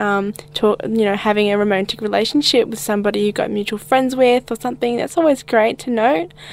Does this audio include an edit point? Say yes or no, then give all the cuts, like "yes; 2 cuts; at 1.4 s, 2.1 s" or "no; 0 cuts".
no; 0 cuts